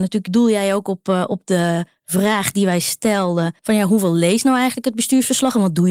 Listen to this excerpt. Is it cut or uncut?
cut